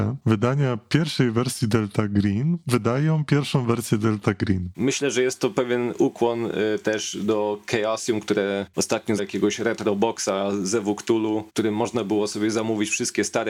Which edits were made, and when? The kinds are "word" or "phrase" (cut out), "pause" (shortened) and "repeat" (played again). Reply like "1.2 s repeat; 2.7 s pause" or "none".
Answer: 9.2 s word